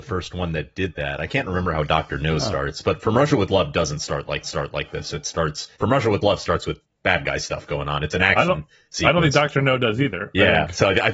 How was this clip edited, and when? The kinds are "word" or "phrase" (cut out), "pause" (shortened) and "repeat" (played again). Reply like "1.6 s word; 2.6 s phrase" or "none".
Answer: 4.4 s repeat; 5.7 s pause